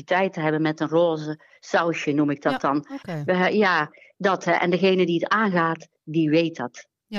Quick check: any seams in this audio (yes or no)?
no